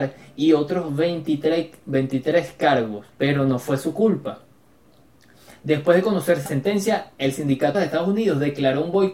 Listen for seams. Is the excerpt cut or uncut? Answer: cut